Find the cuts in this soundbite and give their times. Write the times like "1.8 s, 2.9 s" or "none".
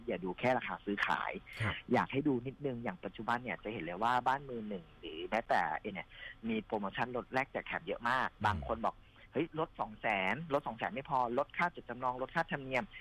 5.9 s